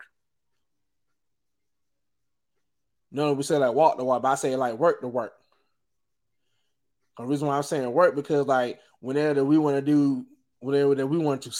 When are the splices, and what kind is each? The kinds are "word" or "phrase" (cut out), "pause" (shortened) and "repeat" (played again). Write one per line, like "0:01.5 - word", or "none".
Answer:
none